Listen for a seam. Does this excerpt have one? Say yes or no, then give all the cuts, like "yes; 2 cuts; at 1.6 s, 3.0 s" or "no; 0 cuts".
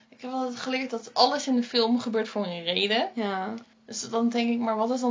yes; 1 cut; at 3.7 s